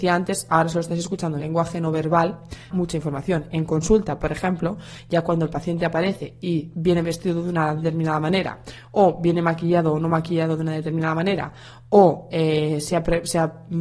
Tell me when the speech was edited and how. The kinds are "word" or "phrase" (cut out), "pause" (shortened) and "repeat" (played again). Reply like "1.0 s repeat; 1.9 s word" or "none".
1.4 s phrase; 2.7 s phrase

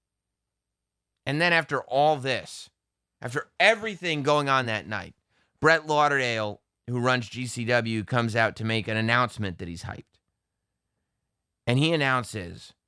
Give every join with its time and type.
none

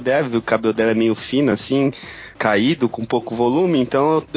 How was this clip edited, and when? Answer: none

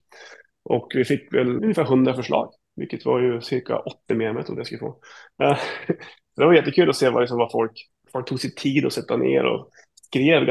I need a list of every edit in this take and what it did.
1.6 s word

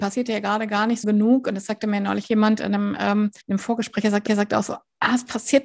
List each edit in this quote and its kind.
1.0 s word; 2.2 s word; 3.4 s pause; 4.3 s repeat

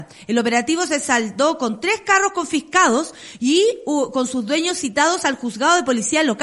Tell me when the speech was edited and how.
none

